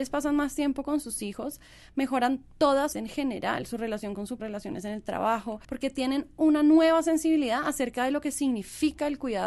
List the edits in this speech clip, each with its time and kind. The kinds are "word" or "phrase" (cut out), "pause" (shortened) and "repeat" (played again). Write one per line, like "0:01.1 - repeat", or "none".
0:02.9 - phrase
0:04.4 - phrase
0:05.6 - pause